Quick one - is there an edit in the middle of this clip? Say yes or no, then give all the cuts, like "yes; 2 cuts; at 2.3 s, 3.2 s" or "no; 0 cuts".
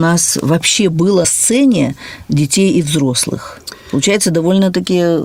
yes; 1 cut; at 1.2 s